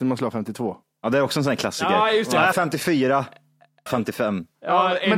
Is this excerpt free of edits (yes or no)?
no